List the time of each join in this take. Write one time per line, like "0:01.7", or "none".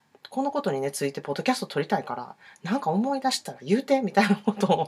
none